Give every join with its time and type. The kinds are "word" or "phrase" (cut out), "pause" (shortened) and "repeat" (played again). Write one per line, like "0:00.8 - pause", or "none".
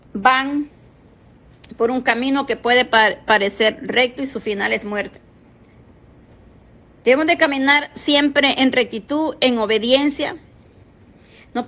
none